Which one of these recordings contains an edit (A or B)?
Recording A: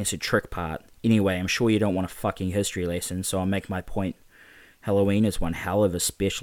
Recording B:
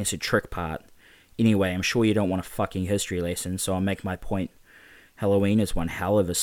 A